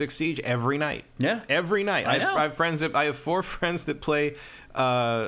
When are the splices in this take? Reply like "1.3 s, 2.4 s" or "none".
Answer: none